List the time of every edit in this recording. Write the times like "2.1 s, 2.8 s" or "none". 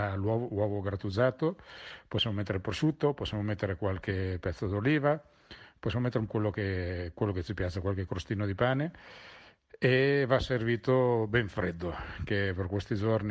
6.3 s

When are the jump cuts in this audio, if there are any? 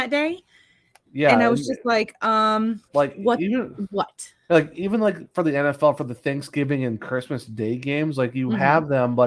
2.9 s, 4.4 s

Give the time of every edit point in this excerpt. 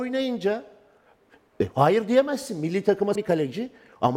3.2 s

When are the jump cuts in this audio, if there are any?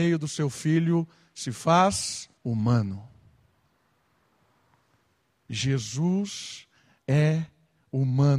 2.4 s

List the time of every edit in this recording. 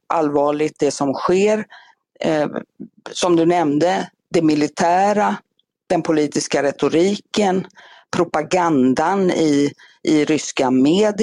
none

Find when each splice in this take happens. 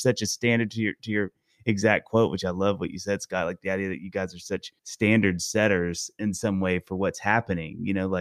4.8 s

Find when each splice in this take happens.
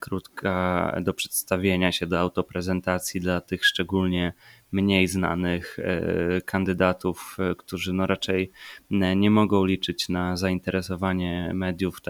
none

